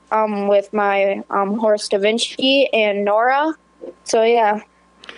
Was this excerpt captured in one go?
no; 1 cut; at 4.0 s

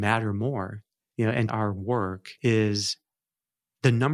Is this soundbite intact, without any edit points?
no; 3 cuts; at 1.0 s, 1.5 s, 2.4 s

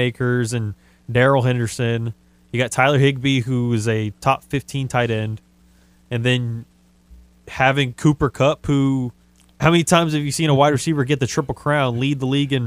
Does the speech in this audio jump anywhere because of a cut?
yes; 1 cut; at 9.2 s

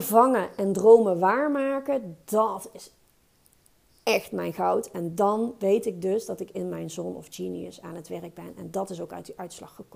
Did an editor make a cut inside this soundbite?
no; 0 cuts

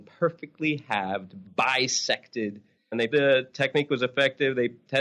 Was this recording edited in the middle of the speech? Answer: yes; 3 cuts; at 1.4 s, 2.8 s, 3.1 s

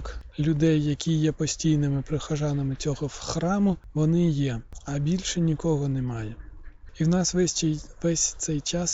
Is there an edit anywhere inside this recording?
no; 0 cuts

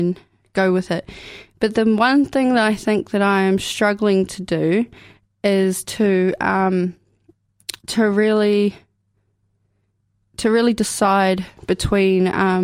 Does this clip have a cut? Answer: yes; 1 cut; at 7.8 s

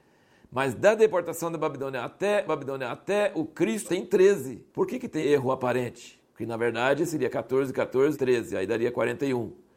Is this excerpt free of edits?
no; 6 cuts; at 2.5 s, 3.8 s, 4.7 s, 5.2 s, 6.3 s, 8.1 s

